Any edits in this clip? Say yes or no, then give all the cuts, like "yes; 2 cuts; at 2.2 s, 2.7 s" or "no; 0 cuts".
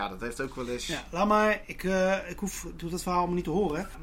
no; 0 cuts